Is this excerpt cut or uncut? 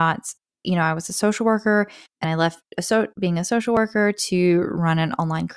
cut